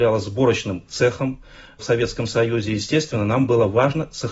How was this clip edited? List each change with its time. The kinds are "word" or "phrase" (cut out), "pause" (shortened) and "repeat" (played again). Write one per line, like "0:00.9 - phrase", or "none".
none